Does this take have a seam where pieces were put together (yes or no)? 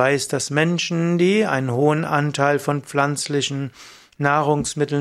no